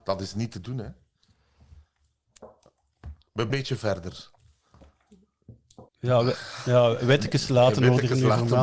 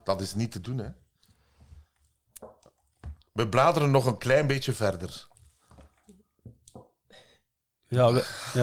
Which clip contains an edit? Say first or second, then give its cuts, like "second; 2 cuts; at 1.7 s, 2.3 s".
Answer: first; 2 cuts; at 3.5 s, 5.9 s